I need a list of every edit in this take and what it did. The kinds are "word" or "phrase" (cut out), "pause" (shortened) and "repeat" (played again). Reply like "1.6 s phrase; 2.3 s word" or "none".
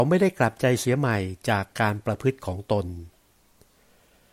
none